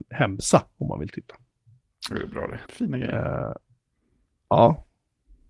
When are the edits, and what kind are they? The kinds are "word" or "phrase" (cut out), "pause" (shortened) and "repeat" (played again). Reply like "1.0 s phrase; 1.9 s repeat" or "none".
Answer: 2.7 s pause